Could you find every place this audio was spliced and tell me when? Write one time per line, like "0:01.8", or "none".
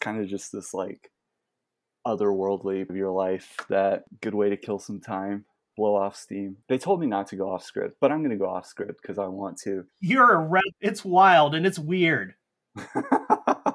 0:02.9
0:06.6
0:09.9
0:10.7